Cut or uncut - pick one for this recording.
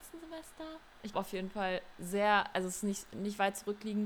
cut